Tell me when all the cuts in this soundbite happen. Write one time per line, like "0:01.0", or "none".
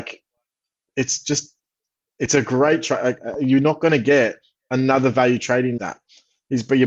0:05.8